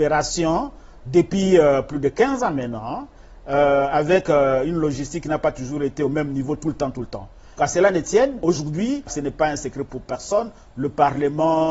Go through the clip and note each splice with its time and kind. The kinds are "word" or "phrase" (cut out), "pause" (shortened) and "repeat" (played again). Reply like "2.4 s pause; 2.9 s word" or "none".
none